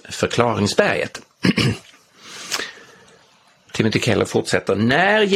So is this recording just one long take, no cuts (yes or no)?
yes